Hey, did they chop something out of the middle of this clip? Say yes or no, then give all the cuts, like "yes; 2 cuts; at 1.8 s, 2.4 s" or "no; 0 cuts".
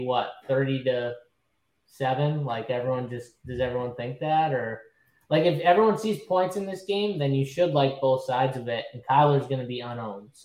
no; 0 cuts